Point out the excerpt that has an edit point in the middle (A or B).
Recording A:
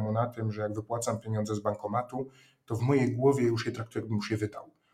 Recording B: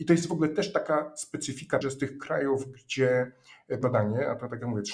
B